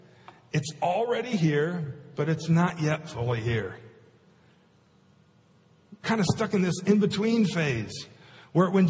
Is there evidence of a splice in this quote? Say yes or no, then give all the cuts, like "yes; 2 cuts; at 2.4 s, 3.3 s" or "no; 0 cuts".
yes; 1 cut; at 6.0 s